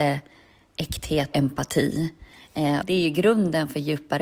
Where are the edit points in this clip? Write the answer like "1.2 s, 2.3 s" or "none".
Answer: 1.3 s, 2.8 s